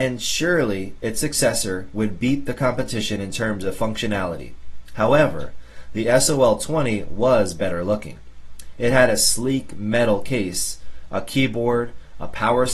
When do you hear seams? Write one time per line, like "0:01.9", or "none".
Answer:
none